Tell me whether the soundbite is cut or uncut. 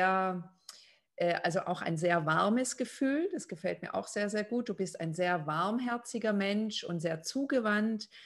uncut